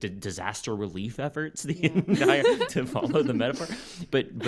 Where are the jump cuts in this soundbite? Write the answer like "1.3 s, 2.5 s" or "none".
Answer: 2.7 s